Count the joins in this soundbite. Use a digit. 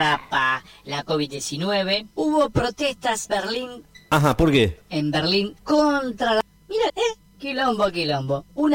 4